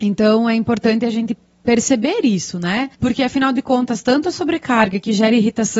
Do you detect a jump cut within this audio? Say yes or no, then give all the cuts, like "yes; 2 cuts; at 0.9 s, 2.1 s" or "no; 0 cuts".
no; 0 cuts